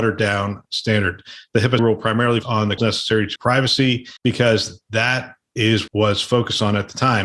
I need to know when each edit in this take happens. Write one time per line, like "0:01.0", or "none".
0:01.8
0:02.4
0:02.8
0:03.4
0:04.2
0:05.9